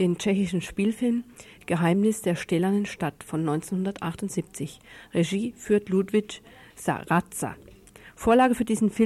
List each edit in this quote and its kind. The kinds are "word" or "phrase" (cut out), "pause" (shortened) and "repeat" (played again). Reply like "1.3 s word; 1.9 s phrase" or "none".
none